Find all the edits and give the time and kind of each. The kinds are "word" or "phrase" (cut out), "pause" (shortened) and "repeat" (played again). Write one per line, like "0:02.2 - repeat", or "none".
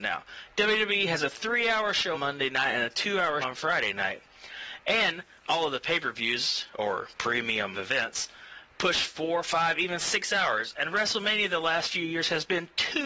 0:02.1 - word
0:03.4 - word
0:07.7 - word